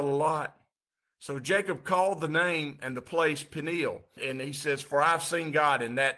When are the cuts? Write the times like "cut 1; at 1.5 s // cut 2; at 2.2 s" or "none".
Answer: none